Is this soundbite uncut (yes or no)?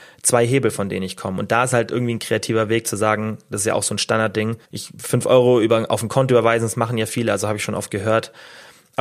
no